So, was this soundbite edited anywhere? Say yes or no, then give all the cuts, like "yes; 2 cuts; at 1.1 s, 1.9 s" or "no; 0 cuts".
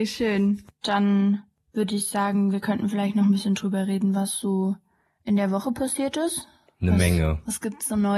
no; 0 cuts